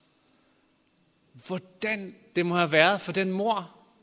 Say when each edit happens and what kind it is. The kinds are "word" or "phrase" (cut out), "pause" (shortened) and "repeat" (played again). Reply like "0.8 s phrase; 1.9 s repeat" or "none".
none